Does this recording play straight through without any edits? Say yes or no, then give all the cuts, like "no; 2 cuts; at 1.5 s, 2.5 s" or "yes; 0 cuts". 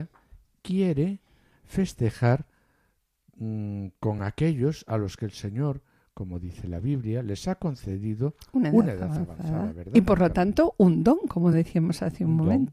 yes; 0 cuts